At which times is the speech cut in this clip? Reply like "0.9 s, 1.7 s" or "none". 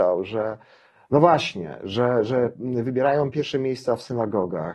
none